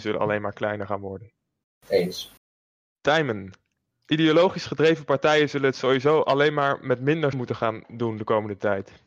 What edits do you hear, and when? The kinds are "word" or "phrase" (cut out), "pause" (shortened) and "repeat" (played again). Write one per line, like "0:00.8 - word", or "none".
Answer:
0:07.3 - word